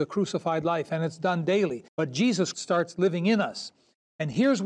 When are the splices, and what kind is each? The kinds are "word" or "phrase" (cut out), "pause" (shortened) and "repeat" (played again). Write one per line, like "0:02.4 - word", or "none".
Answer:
0:01.9 - pause
0:02.5 - word

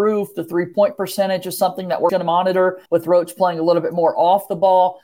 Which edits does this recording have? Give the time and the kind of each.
0:02.1 - word
0:02.9 - pause

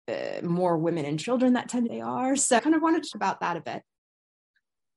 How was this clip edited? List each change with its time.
0:01.9 - phrase
0:02.6 - word
0:03.1 - word

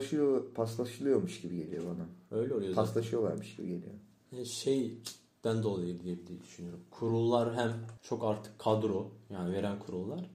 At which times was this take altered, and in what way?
none

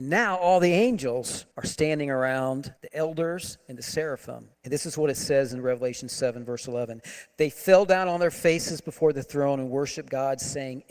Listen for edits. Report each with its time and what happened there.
0:01.5 - pause
0:02.8 - pause
0:04.5 - pause

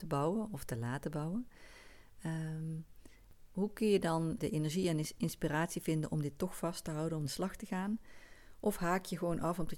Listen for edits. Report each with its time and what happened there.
0:04.4 - word
0:07.3 - phrase

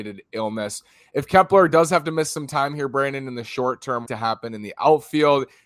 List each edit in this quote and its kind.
0:04.1 - phrase

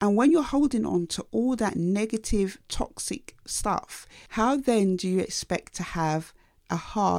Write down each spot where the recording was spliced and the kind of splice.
none

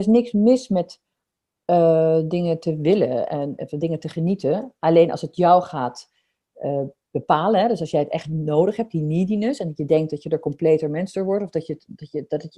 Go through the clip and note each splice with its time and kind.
none

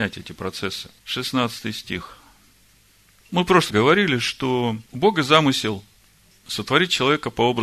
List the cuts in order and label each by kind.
0:01.0 - pause
0:02.5 - pause
0:03.7 - word
0:04.8 - pause

